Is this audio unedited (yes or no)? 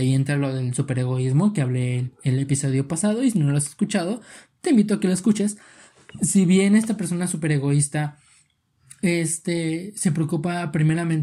yes